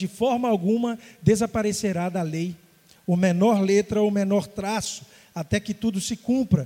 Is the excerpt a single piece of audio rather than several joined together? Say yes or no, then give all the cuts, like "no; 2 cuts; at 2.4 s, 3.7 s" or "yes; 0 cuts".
yes; 0 cuts